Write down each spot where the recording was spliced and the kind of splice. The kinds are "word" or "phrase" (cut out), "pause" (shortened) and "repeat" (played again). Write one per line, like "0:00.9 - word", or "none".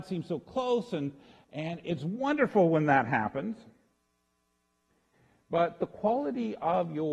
none